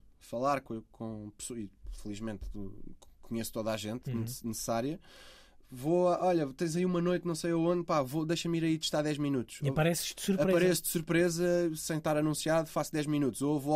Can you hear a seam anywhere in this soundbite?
no; 0 cuts

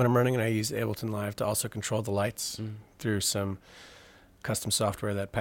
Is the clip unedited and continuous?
yes; 0 cuts

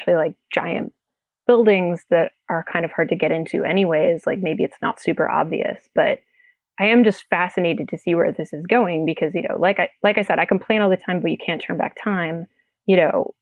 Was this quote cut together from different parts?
no; 0 cuts

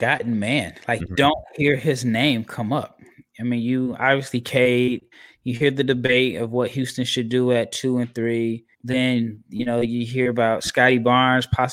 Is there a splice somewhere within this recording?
yes; 2 cuts; at 1.0 s, 8.7 s

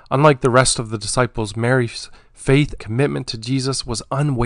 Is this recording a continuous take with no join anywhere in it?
no; 1 cut; at 2.8 s

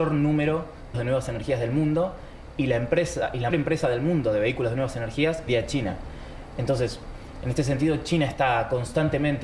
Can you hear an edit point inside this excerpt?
yes; 3 cuts; at 0.9 s, 3.5 s, 5.5 s

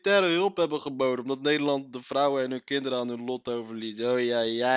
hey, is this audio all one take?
yes; 0 cuts

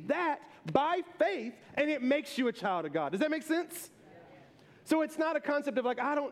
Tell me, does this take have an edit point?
no; 0 cuts

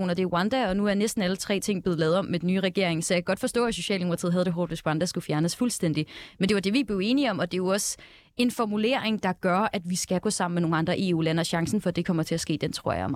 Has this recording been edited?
no; 0 cuts

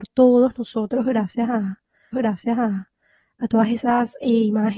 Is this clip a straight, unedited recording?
no; 1 cut; at 2.1 s

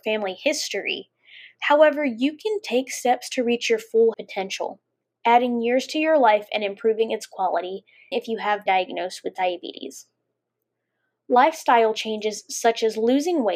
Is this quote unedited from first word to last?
no; 3 cuts; at 4.1 s, 8.1 s, 8.7 s

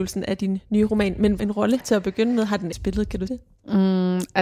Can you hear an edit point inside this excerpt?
yes; 4 cuts; at 1.4 s, 1.8 s, 2.7 s, 3.3 s

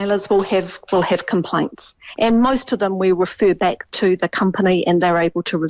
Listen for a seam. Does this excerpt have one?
no; 0 cuts

